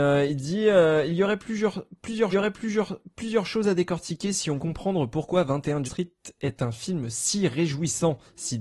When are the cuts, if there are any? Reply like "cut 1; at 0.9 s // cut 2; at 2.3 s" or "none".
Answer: cut 1; at 2.3 s // cut 2; at 4.6 s // cut 3; at 5.8 s